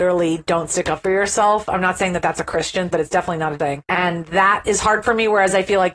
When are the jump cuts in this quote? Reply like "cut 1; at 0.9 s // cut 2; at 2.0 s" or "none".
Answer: cut 1; at 2.9 s // cut 2; at 3.6 s